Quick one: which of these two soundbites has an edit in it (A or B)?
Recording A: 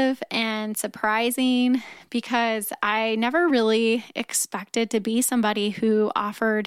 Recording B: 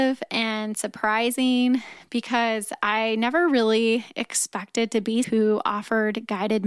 B